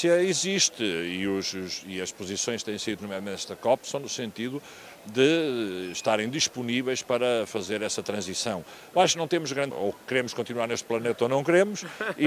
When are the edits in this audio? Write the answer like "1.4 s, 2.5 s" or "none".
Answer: 3.0 s, 9.7 s